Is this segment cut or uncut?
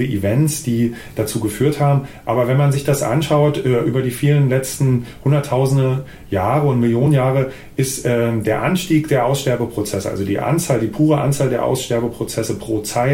uncut